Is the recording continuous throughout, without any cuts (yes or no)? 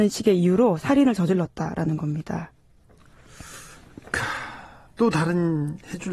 yes